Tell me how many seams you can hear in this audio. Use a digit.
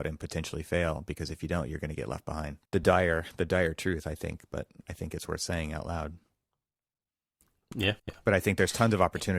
2